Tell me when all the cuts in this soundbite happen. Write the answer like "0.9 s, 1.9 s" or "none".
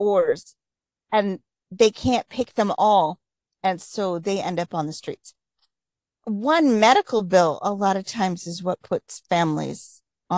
none